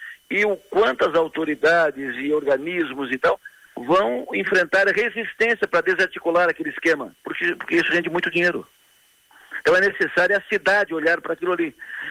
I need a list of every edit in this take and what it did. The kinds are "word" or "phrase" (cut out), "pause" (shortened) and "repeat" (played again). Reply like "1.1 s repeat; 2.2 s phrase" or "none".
7.2 s pause